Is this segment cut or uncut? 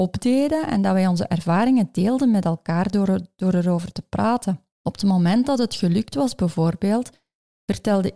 cut